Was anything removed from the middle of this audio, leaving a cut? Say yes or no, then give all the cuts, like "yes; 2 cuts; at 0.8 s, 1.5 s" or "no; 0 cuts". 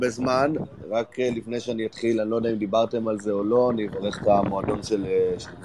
no; 0 cuts